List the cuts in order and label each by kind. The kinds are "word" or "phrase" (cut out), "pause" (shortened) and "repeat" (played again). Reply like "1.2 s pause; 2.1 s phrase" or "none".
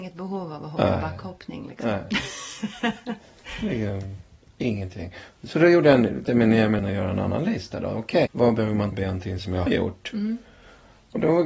6.2 s word; 6.8 s word; 8.3 s word; 8.9 s word; 9.7 s word